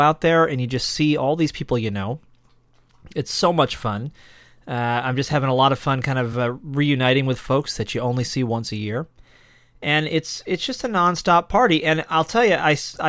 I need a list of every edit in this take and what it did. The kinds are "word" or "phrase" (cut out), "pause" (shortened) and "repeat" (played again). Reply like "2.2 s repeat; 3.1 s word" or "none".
none